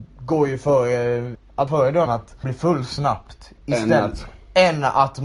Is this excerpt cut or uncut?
cut